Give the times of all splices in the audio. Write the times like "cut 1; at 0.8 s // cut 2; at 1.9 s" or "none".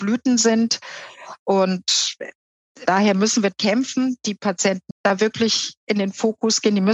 cut 1; at 2.9 s // cut 2; at 3.5 s // cut 3; at 4.9 s